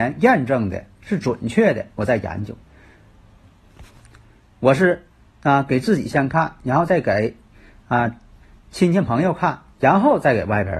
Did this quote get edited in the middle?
no; 0 cuts

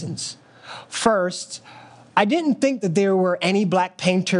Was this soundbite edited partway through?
no; 0 cuts

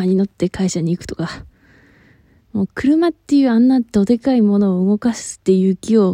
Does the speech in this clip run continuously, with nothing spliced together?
yes; 0 cuts

